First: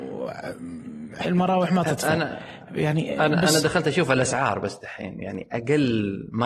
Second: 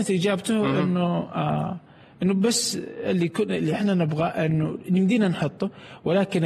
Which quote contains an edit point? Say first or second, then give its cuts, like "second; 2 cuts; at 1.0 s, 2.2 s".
first; 1 cut; at 1.2 s